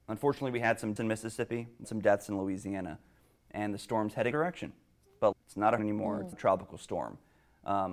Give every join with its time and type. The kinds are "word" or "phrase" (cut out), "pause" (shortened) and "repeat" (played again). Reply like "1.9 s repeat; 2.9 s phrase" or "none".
1.0 s word; 1.8 s word; 4.3 s word; 5.3 s word; 5.8 s word; 6.3 s word

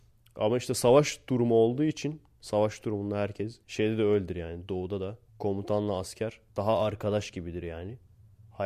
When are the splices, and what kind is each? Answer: 3.6 s pause; 5.3 s pause; 6.5 s pause

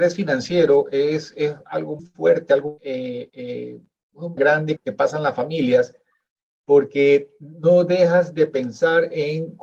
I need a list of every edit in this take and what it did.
2.0 s word; 2.8 s word; 4.4 s word; 4.8 s word

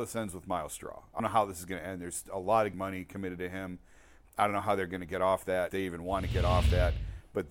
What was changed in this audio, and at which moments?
1.2 s word; 2.7 s word; 5.7 s word

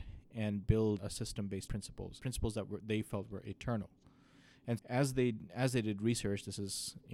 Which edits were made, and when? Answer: 1.0 s word; 1.7 s word; 2.2 s word; 4.8 s word

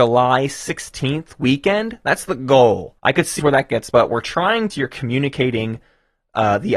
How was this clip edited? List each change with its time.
3.0 s pause; 3.4 s word; 3.9 s word; 4.7 s phrase

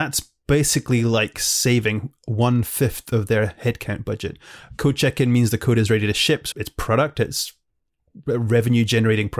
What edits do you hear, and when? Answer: 6.5 s word

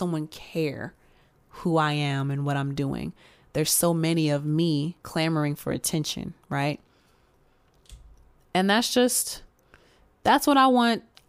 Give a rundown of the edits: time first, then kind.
5.0 s pause

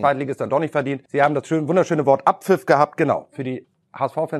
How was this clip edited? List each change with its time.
1.0 s pause

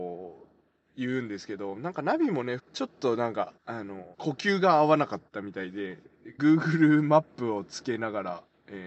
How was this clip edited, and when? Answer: 2.6 s phrase; 3.6 s pause; 4.1 s pause; 5.3 s pause; 6.4 s phrase

